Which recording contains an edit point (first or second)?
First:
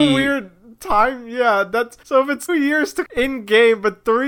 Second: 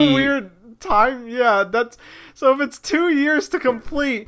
first